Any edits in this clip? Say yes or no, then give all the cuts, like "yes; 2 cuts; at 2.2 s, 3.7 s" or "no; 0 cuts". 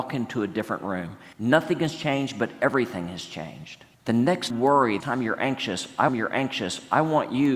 yes; 5 cuts; at 1.3 s, 3.9 s, 4.5 s, 5.0 s, 6.1 s